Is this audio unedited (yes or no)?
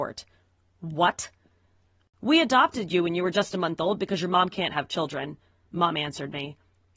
yes